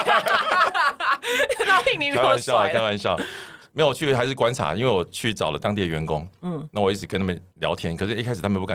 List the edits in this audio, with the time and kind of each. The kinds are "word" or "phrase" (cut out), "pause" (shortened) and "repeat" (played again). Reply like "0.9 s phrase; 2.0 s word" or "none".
7.5 s pause